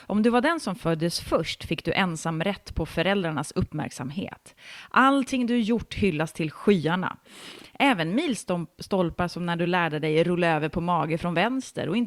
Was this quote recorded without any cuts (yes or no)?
yes